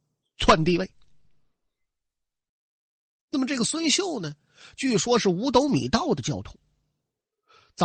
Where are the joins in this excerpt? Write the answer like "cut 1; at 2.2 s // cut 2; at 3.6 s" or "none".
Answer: none